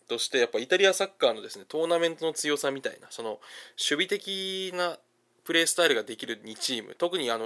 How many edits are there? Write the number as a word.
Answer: zero